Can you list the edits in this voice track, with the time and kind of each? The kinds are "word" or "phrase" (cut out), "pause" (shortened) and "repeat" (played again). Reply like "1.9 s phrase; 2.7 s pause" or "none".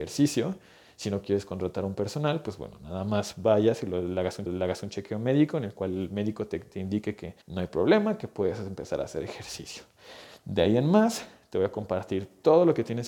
4.5 s repeat; 7.4 s pause